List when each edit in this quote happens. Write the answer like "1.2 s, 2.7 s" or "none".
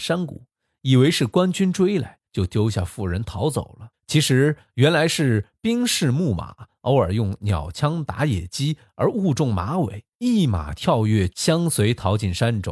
2.2 s, 3.9 s, 10.1 s, 11.3 s